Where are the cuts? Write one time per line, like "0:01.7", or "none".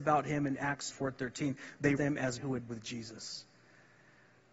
0:00.9
0:02.0
0:02.4
0:02.7